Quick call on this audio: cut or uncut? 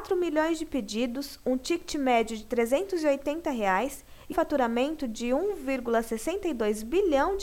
cut